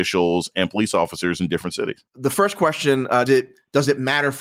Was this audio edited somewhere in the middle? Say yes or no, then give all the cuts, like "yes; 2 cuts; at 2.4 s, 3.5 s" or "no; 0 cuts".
yes; 2 cuts; at 2.1 s, 3.3 s